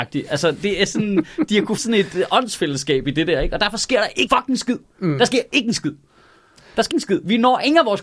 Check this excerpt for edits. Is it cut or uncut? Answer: cut